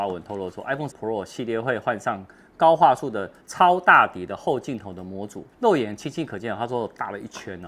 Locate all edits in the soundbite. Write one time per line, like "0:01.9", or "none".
0:00.9
0:03.4
0:05.5